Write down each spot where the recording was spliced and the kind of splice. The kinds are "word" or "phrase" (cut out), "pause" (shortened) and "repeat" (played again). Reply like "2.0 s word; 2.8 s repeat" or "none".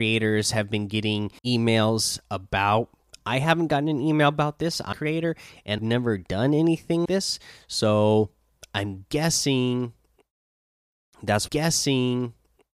1.4 s pause; 3.1 s pause; 4.9 s phrase; 5.8 s word; 7.1 s word; 11.5 s repeat